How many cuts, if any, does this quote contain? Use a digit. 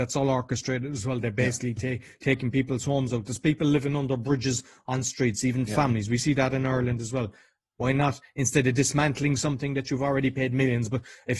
0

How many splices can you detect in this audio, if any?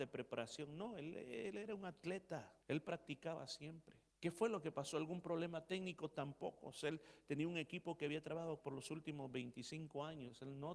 3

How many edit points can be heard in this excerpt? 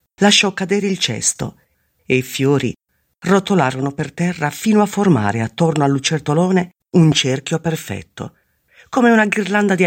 1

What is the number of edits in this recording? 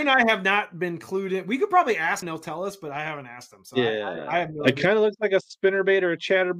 1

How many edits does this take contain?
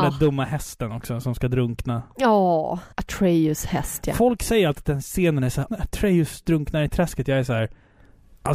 2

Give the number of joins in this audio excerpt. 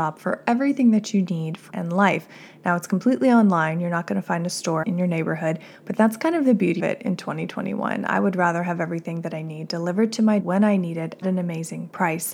5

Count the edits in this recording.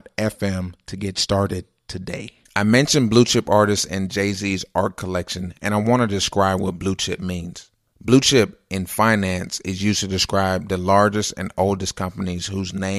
1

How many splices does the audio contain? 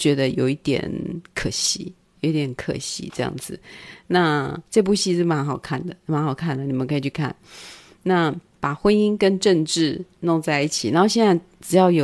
2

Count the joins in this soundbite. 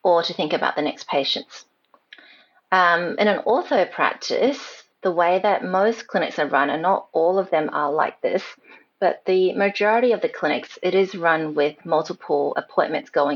0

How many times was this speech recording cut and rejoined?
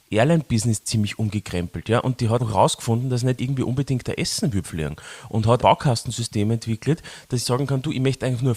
5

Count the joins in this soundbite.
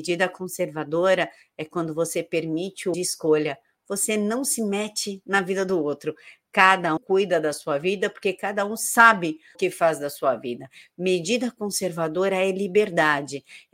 3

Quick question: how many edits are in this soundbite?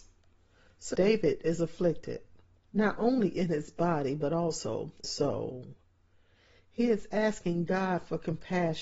3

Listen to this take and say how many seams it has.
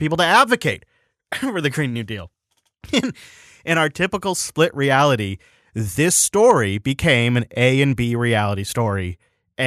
0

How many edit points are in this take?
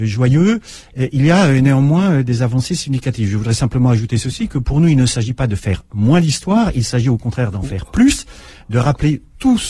0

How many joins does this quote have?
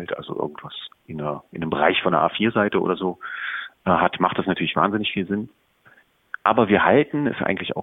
0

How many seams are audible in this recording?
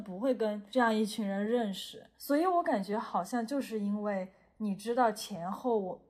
0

